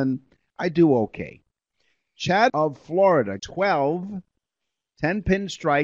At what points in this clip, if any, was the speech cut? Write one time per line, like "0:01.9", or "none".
0:02.5
0:03.4